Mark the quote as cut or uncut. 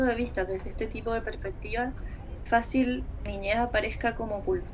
cut